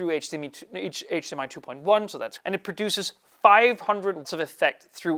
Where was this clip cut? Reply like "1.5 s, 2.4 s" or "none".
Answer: 2.4 s, 4.2 s